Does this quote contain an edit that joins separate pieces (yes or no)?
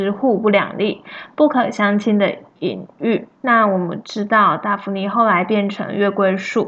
yes